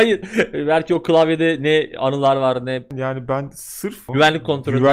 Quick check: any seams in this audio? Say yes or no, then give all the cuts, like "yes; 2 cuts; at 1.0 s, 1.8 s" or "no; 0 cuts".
no; 0 cuts